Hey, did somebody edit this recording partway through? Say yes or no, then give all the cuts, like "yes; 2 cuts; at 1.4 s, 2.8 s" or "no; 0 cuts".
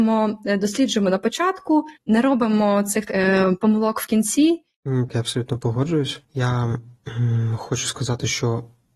yes; 4 cuts; at 2.0 s, 3.1 s, 5.1 s, 6.2 s